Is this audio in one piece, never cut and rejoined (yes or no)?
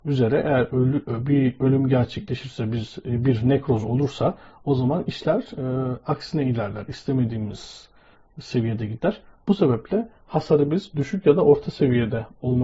yes